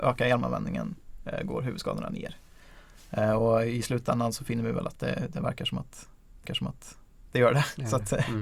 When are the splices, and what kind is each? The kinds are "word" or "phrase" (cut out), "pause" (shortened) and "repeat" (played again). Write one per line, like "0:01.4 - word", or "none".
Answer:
0:06.5 - repeat